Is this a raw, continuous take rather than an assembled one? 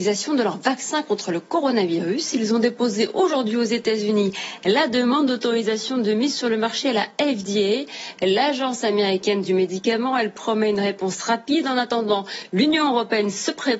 yes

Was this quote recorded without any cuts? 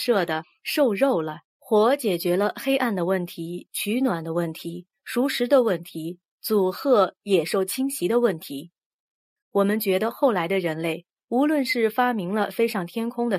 no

